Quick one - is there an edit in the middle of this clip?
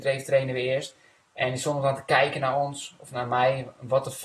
no; 0 cuts

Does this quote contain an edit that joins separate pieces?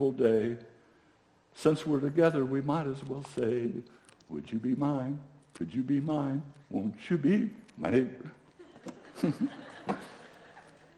no; 0 cuts

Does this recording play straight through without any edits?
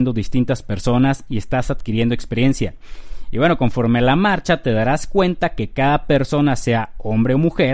yes; 0 cuts

